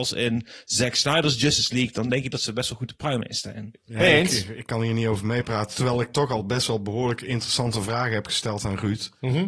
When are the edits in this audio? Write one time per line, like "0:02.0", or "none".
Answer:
none